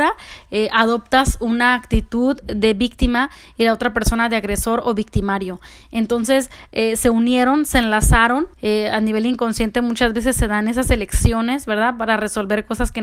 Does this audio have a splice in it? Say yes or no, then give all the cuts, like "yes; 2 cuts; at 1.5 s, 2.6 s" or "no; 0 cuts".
yes; 1 cut; at 8.5 s